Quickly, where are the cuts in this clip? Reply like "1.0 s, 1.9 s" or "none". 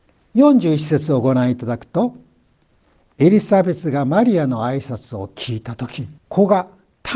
6.2 s